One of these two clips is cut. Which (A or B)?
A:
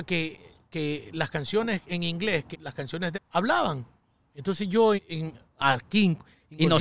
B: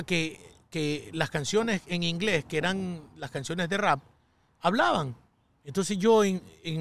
A